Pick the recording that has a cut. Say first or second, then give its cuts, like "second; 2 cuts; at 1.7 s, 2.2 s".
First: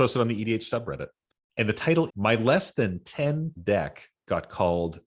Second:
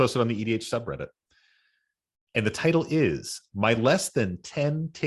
first; 3 cuts; at 1.3 s, 2.1 s, 3.5 s